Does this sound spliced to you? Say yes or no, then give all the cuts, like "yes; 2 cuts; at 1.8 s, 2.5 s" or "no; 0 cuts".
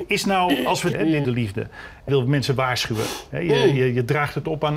yes; 3 cuts; at 0.9 s, 1.2 s, 2.1 s